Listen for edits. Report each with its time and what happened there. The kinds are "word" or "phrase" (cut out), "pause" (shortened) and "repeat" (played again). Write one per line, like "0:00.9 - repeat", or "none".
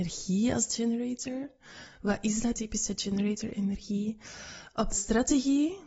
0:02.5 - word
0:04.9 - word